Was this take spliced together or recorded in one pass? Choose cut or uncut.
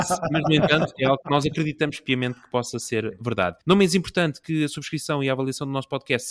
cut